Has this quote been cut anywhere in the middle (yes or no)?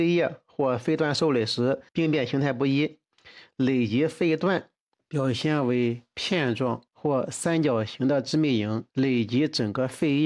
yes